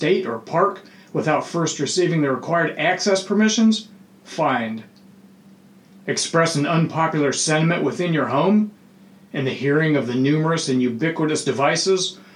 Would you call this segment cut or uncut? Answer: uncut